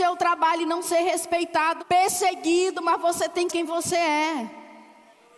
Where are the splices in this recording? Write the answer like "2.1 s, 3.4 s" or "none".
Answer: 1.8 s, 3.5 s